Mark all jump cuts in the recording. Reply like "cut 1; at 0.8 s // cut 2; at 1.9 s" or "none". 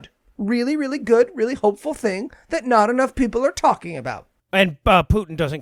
none